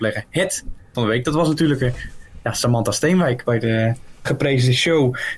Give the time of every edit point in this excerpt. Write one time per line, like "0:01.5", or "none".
0:00.9
0:04.3